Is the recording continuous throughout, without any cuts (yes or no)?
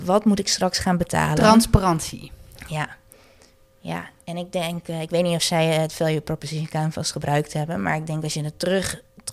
yes